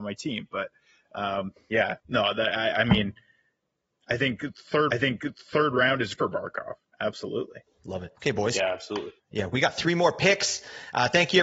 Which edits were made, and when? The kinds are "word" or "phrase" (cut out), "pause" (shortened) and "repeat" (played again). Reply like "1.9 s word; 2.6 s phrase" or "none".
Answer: 2.0 s pause; 4.9 s repeat; 6.1 s word; 6.8 s pause; 8.2 s pause